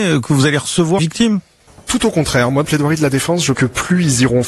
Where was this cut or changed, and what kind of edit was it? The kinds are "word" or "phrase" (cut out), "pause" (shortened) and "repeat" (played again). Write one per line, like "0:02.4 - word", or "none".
0:01.0 - phrase
0:01.7 - word
0:02.6 - word
0:03.5 - word